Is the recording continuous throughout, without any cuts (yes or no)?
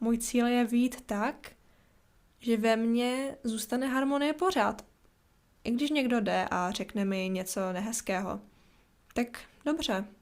yes